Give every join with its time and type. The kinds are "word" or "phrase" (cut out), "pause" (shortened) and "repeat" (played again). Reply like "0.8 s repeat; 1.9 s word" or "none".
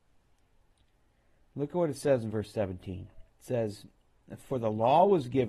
3.3 s pause